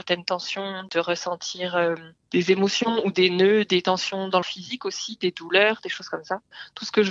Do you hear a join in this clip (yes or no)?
yes